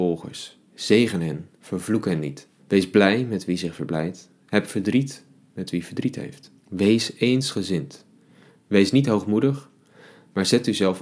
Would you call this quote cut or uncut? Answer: cut